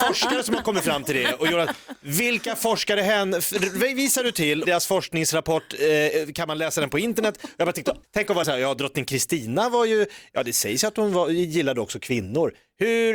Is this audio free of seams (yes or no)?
no